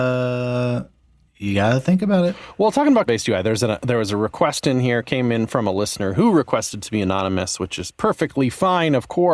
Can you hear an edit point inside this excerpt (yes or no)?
yes